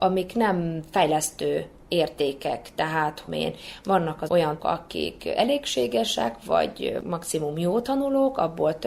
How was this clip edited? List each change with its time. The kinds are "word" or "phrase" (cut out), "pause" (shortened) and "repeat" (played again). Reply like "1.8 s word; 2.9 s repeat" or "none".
3.3 s phrase; 4.3 s word; 4.6 s word